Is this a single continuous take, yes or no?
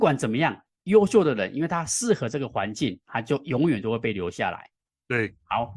yes